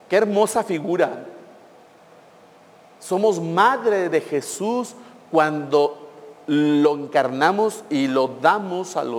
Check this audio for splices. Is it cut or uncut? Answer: uncut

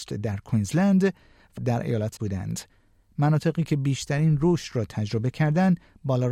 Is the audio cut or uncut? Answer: cut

